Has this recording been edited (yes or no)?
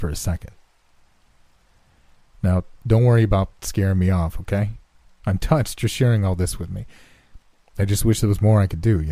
no